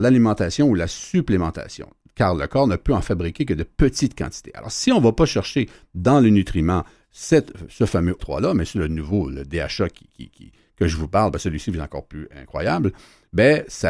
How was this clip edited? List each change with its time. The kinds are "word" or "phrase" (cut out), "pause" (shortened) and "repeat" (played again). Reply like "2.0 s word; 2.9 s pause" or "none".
8.2 s word